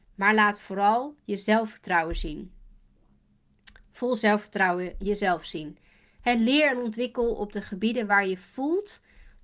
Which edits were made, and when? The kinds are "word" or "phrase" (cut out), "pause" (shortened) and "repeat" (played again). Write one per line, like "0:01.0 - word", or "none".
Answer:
none